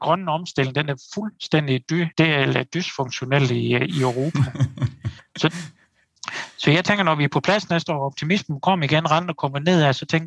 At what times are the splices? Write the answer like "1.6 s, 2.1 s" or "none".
2.1 s, 5.2 s